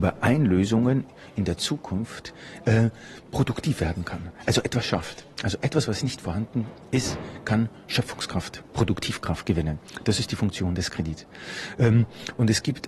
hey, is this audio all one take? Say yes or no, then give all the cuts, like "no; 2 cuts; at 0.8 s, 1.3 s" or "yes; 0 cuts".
yes; 0 cuts